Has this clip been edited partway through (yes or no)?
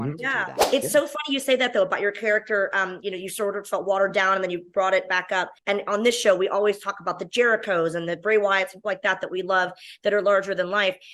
yes